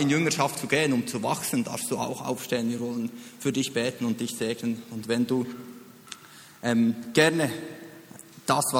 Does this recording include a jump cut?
no; 0 cuts

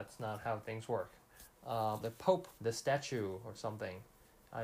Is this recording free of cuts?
no; 2 cuts; at 2.0 s, 2.6 s

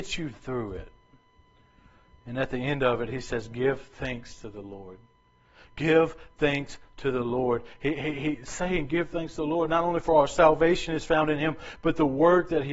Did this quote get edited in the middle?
no; 0 cuts

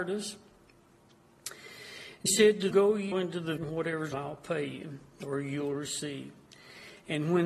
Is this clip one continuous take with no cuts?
no; 5 cuts; at 2.3 s, 2.7 s, 3.1 s, 3.6 s, 4.1 s

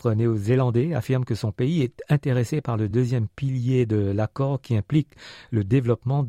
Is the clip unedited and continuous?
yes; 0 cuts

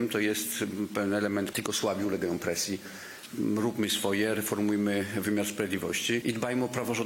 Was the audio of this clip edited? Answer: yes; 1 cut; at 1.5 s

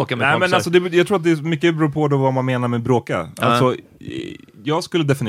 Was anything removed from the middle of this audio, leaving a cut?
no; 0 cuts

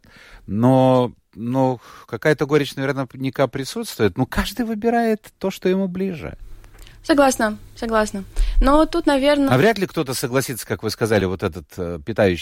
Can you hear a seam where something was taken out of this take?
no; 0 cuts

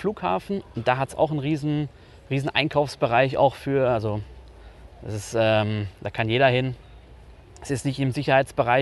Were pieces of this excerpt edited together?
no; 0 cuts

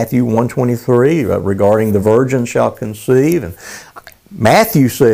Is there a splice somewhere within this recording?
no; 0 cuts

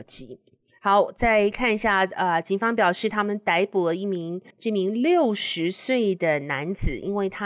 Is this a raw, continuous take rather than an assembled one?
no; 1 cut; at 4.5 s

